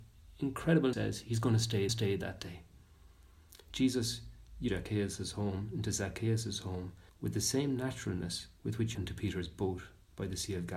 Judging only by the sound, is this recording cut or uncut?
cut